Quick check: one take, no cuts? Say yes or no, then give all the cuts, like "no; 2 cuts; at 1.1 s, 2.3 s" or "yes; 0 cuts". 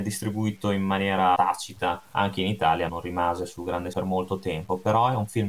no; 4 cuts; at 1.4 s, 2.1 s, 2.9 s, 3.9 s